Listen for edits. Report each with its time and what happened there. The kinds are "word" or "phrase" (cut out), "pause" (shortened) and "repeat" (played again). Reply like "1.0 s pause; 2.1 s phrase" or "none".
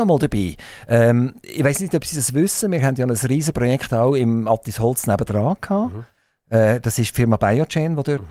none